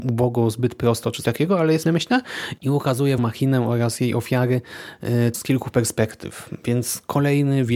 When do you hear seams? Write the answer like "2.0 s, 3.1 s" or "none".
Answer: 1.2 s, 1.8 s, 3.2 s, 5.3 s